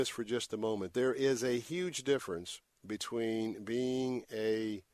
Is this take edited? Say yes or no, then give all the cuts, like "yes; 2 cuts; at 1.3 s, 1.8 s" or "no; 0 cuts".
no; 0 cuts